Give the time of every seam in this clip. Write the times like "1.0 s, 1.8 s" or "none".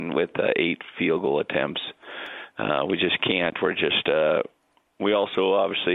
none